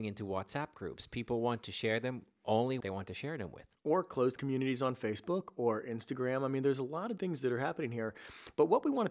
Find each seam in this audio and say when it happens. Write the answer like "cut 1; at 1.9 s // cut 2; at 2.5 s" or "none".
cut 1; at 2.8 s // cut 2; at 7.2 s